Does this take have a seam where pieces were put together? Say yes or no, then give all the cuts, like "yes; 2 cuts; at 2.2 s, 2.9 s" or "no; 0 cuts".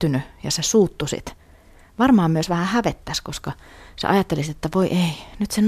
no; 0 cuts